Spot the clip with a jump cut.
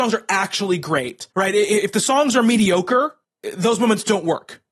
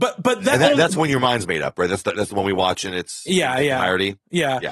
first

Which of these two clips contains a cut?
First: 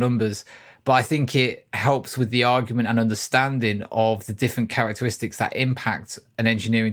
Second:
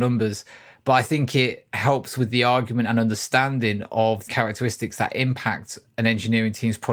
second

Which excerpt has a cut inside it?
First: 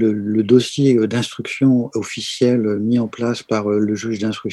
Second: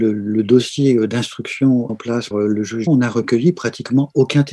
second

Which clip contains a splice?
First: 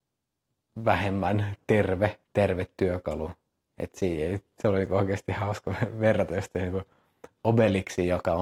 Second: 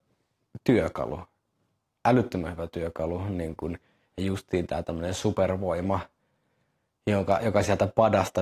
first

